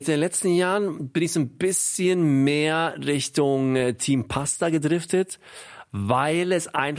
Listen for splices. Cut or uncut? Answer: uncut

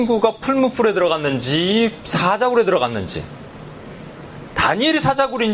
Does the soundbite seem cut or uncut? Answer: uncut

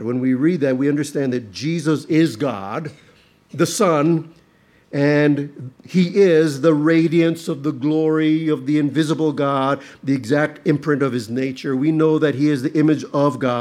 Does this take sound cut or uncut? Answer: uncut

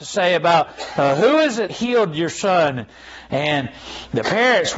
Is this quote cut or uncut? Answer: cut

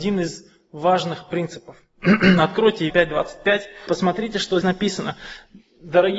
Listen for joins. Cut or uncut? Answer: cut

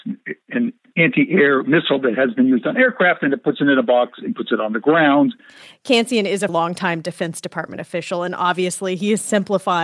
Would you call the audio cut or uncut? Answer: cut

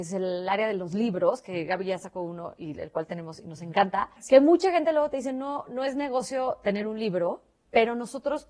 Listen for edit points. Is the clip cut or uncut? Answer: cut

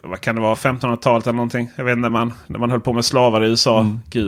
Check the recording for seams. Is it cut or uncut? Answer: uncut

